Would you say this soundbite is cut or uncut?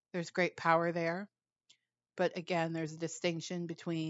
uncut